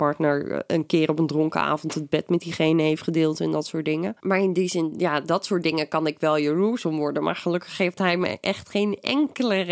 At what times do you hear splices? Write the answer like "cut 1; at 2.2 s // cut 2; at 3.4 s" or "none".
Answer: cut 1; at 4.2 s